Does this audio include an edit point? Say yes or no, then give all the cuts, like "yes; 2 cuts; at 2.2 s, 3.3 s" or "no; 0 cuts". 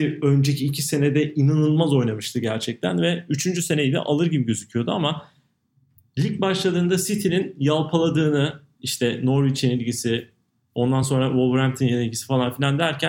no; 0 cuts